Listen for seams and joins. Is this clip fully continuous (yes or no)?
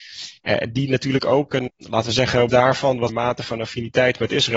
no